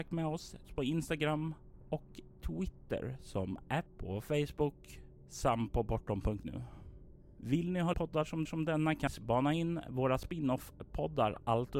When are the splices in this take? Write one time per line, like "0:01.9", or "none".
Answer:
0:03.9
0:07.9
0:08.5
0:09.1

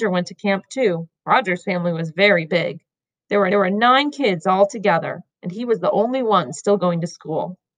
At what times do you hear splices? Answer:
0:01.2
0:03.5
0:05.3

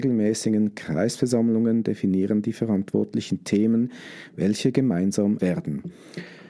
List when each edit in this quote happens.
0:05.4

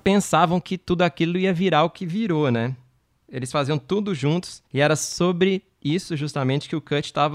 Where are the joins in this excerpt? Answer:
0:04.7

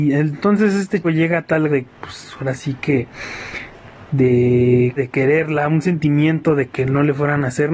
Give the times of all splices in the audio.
0:01.0
0:01.7
0:05.0

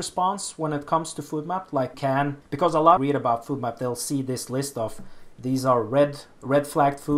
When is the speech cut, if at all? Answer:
0:01.9
0:02.4
0:03.0
0:05.3

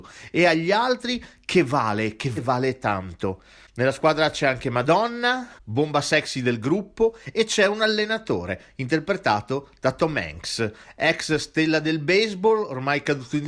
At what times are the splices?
0:02.4

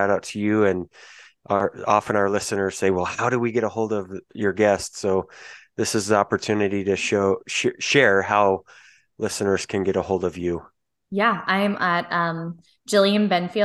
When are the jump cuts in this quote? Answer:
none

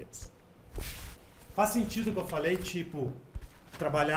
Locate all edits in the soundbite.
none

